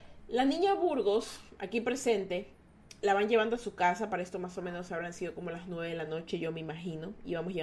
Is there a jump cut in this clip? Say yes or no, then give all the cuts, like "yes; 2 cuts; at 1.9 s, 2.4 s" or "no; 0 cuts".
no; 0 cuts